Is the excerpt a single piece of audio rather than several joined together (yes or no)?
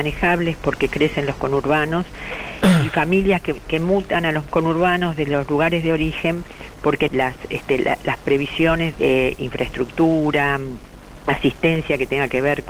no